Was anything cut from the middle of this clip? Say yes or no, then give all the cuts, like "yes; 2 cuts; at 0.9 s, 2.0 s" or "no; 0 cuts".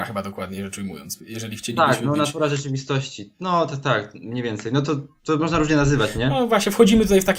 no; 0 cuts